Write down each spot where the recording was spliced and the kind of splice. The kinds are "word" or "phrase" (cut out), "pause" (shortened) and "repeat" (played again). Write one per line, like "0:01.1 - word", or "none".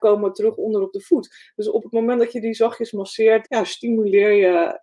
0:03.4 - word